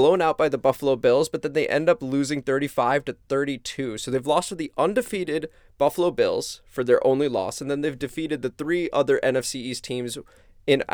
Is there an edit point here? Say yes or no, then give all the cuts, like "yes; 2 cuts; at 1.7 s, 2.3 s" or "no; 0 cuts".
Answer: no; 0 cuts